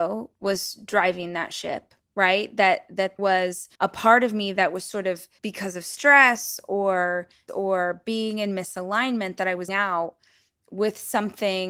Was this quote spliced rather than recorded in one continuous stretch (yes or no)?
yes